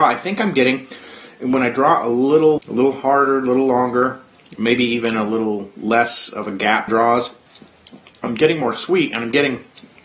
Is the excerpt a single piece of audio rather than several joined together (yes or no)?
no